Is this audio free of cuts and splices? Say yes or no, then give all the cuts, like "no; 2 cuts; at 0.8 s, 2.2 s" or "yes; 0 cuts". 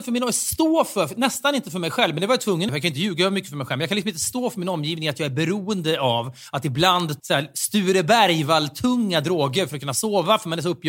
no; 2 cuts; at 2.7 s, 7.2 s